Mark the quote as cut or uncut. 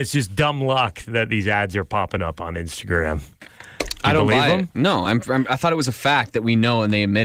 uncut